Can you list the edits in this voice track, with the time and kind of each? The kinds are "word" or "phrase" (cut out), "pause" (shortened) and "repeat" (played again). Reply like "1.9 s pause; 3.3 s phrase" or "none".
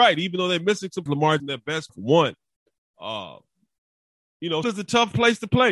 1.1 s word; 1.4 s word; 1.9 s word; 4.6 s word